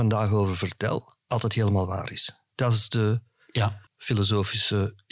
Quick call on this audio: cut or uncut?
cut